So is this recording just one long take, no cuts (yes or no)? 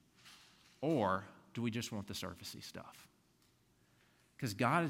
yes